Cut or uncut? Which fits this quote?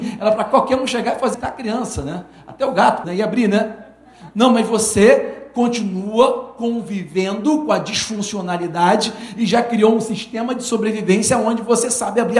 cut